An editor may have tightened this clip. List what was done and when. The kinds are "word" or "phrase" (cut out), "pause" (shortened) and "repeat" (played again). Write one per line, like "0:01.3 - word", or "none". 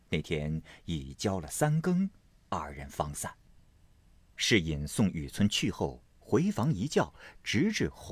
none